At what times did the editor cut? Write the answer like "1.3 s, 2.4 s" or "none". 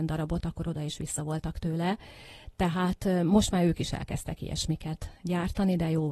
none